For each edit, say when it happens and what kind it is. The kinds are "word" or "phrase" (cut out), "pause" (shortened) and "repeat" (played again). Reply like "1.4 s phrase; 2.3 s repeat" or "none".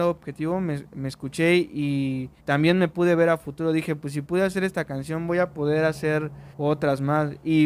2.4 s pause; 6.5 s pause